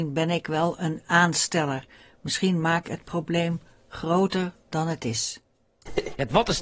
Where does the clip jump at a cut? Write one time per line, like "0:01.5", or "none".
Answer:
0:02.8